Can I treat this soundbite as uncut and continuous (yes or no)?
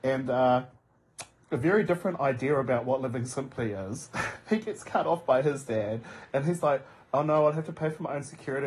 yes